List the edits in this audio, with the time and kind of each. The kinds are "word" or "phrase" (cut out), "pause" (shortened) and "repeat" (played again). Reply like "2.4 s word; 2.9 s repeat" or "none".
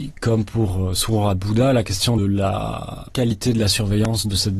2.2 s word